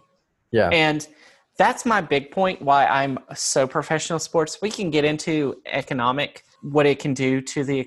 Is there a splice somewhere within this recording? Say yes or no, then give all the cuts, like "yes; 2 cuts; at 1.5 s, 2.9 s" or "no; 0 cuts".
no; 0 cuts